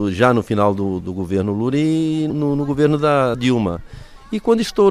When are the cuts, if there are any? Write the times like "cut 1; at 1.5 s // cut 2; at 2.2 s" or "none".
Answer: cut 1; at 1.0 s // cut 2; at 2.3 s // cut 3; at 3.3 s